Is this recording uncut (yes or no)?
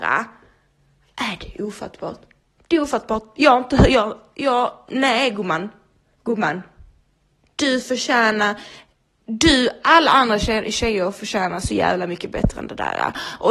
yes